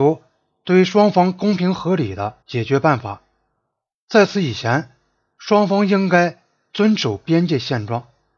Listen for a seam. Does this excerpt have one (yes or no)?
yes